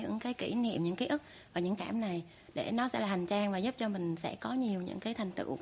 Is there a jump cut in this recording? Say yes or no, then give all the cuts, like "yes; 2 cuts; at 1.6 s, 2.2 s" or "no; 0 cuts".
yes; 1 cut; at 1.8 s